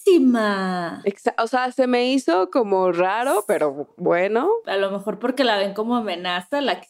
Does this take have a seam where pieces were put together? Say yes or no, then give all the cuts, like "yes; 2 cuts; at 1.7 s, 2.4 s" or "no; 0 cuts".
no; 0 cuts